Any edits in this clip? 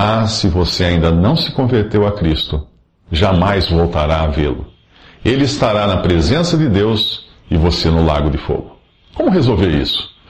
no; 0 cuts

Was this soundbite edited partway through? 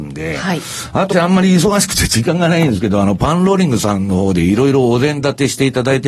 yes; 1 cut; at 1.1 s

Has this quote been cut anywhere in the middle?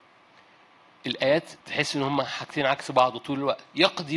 yes; 1 cut; at 1.6 s

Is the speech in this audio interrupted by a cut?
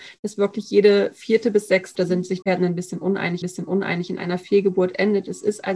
yes; 3 cuts; at 1.9 s, 2.4 s, 3.4 s

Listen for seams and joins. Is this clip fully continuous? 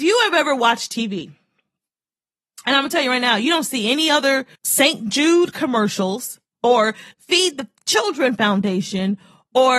no; 2 cuts; at 4.5 s, 7.1 s

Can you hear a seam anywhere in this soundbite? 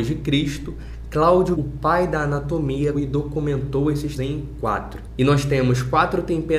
yes; 3 cuts; at 1.6 s, 2.9 s, 4.2 s

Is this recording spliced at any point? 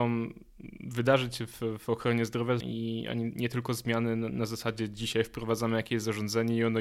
yes; 1 cut; at 2.6 s

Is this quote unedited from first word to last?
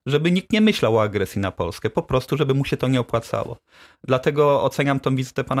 yes; 0 cuts

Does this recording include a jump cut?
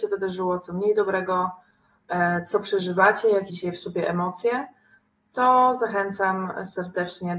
yes; 1 cut; at 3.5 s

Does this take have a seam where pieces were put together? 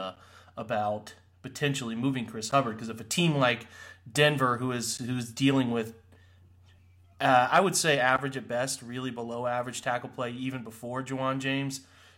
no; 0 cuts

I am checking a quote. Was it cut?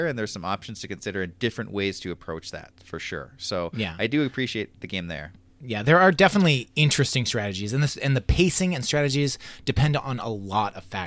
yes; 2 cuts; at 4.7 s, 5.5 s

